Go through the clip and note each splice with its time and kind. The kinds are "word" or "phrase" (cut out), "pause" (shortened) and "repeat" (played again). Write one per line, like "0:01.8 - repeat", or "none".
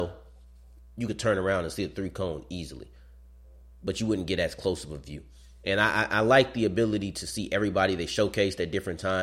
none